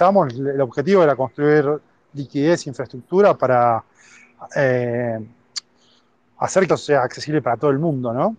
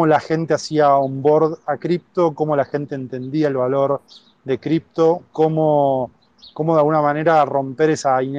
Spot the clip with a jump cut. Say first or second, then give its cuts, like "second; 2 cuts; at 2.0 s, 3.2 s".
first; 1 cut; at 6.7 s